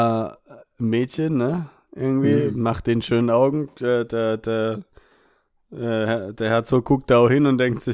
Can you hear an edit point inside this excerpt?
no; 0 cuts

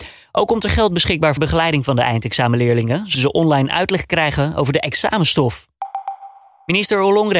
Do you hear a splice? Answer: yes; 2 cuts; at 1.4 s, 3.1 s

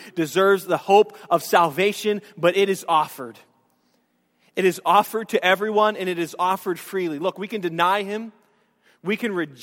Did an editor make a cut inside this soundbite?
no; 0 cuts

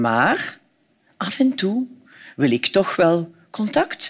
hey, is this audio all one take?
yes; 0 cuts

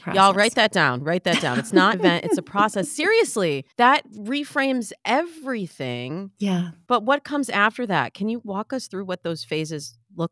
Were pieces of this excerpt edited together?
yes; 2 cuts; at 1.9 s, 3.7 s

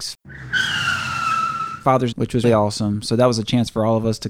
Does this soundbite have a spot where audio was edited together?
yes; 2 cuts; at 2.1 s, 2.4 s

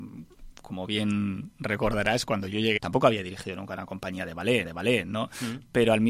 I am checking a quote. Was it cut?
yes; 2 cuts; at 2.8 s, 4.6 s

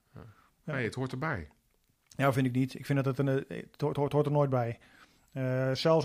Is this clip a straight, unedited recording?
yes; 0 cuts

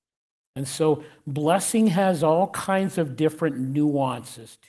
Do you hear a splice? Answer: no; 0 cuts

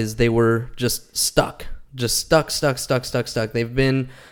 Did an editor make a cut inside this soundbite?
yes; 1 cut; at 1.8 s

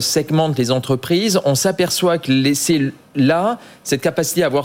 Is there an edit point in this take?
no; 0 cuts

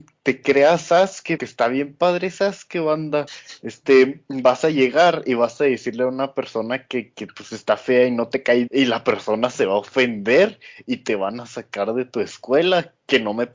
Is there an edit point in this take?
yes; 3 cuts; at 1.4 s, 7.1 s, 8.7 s

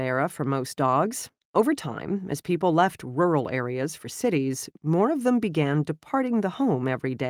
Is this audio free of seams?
yes; 0 cuts

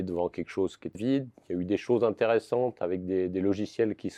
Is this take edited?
yes; 1 cut; at 0.9 s

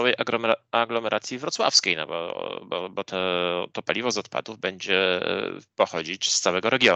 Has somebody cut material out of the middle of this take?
no; 0 cuts

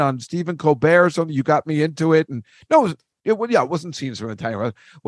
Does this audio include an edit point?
no; 0 cuts

